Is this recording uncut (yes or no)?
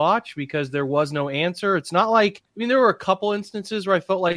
no